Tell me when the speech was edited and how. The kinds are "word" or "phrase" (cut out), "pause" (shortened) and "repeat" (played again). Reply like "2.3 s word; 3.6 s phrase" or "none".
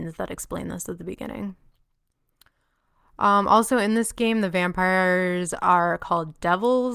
none